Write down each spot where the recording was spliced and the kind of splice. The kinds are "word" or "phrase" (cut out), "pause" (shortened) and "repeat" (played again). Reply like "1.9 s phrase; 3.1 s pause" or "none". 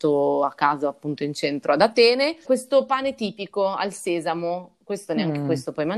2.4 s word